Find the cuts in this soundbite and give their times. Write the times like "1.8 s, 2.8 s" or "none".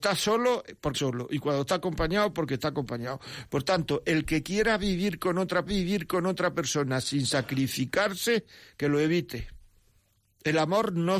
0.9 s, 5.7 s, 10.0 s